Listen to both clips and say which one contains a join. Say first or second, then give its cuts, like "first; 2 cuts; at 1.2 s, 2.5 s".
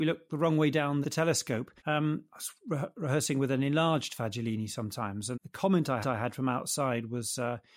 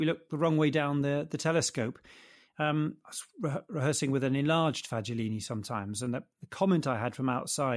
first; 4 cuts; at 1.0 s, 1.8 s, 5.3 s, 6.0 s